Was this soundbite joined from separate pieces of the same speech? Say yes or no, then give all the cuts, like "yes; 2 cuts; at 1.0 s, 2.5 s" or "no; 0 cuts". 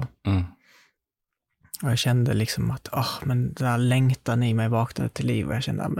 no; 0 cuts